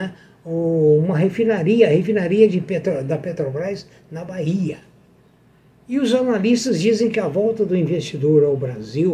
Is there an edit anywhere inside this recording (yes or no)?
no